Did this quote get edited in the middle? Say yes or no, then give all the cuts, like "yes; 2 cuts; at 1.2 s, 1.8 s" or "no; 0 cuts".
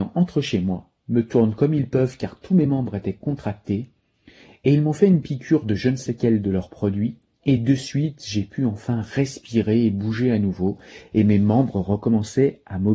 no; 0 cuts